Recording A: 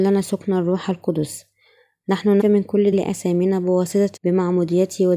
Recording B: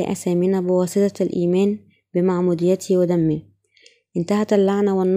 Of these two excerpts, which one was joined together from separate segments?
A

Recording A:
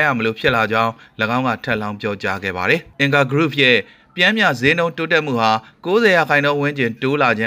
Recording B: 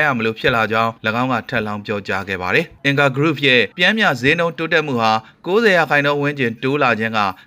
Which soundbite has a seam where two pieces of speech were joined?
B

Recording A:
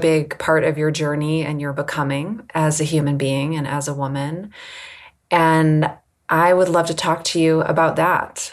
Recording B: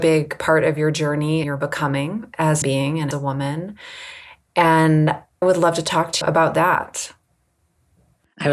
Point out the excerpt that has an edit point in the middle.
B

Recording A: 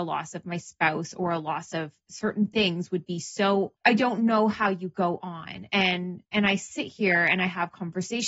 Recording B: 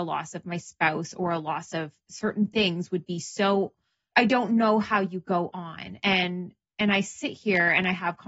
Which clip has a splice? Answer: A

